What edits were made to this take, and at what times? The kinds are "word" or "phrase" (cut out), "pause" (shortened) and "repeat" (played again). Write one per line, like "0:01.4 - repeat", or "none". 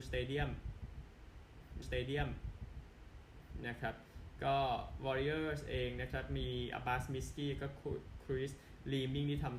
0:01.8 - repeat